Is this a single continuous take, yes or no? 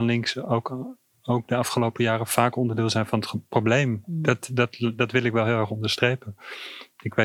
yes